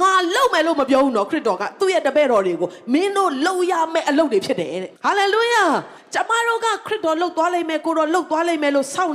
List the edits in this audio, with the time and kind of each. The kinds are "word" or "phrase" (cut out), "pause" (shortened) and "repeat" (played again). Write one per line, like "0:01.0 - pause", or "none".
0:05.0 - pause
0:06.0 - pause